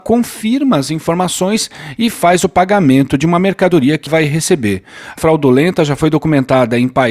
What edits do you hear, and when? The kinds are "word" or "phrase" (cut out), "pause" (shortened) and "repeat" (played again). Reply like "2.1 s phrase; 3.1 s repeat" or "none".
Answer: 4.1 s word; 5.2 s word